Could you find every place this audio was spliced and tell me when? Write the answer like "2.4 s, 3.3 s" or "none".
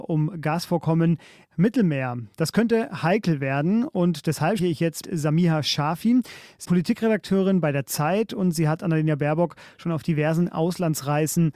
1.5 s, 4.6 s, 5.0 s, 6.6 s